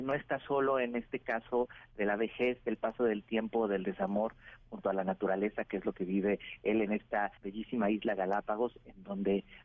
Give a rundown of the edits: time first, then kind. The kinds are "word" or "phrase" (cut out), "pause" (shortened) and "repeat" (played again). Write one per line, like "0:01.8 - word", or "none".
0:07.4 - pause